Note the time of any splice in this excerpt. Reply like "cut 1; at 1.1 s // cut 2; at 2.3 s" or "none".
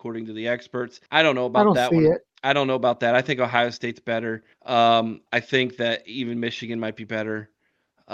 cut 1; at 1.1 s // cut 2; at 2.3 s // cut 3; at 4.5 s